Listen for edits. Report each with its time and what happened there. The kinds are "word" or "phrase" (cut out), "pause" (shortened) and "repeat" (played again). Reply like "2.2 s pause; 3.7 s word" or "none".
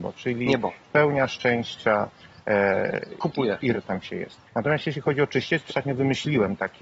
3.7 s word; 4.5 s pause; 5.7 s word